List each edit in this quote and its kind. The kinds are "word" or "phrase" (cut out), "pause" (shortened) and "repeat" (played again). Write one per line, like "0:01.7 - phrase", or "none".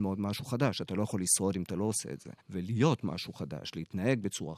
0:02.4 - pause